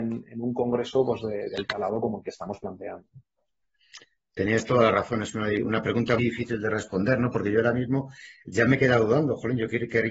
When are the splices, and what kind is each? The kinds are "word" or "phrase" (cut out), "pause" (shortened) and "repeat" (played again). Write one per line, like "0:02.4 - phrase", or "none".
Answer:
0:06.2 - word